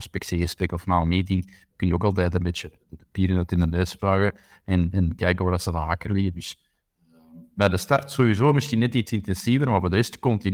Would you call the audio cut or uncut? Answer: cut